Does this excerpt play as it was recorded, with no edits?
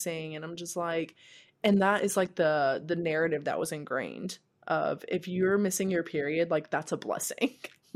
yes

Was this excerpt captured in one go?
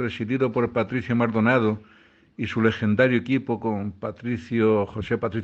yes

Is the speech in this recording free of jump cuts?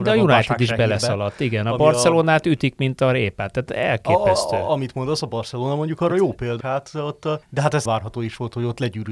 no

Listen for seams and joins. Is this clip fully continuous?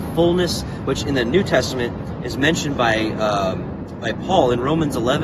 yes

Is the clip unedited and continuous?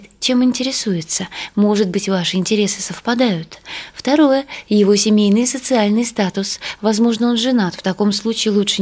yes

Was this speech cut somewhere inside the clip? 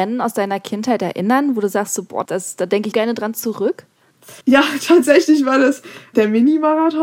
yes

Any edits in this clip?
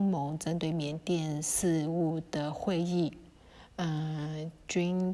no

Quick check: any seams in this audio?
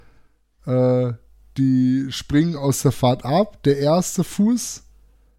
no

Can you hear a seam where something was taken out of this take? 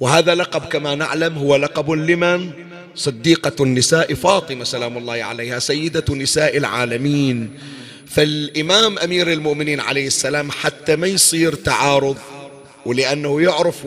no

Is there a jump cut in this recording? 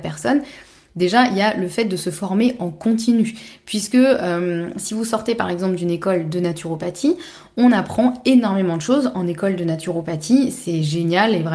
no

